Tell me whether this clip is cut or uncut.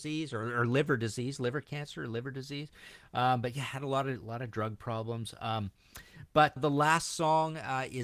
cut